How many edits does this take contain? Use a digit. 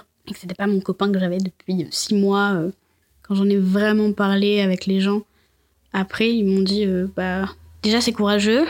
0